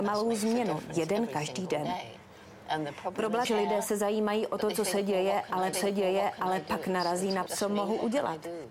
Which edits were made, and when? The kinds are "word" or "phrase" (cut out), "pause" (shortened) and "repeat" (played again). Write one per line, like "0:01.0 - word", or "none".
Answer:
0:03.4 - phrase
0:05.7 - repeat
0:07.5 - word